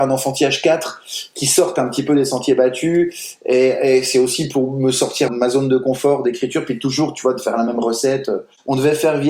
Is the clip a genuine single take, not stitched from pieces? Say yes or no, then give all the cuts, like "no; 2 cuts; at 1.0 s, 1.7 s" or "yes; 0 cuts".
no; 1 cut; at 5.3 s